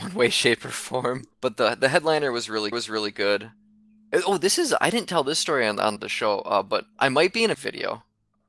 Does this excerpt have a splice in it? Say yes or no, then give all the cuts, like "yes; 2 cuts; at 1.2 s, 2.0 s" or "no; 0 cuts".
yes; 4 cuts; at 1.3 s, 2.7 s, 6.0 s, 7.5 s